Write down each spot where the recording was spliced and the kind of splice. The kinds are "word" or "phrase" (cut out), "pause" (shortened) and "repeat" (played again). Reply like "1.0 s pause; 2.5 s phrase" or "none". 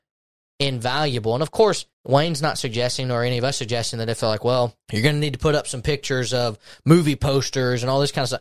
1.9 s pause; 4.8 s pause